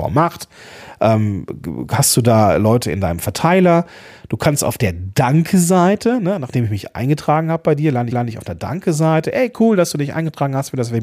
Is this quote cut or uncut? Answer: cut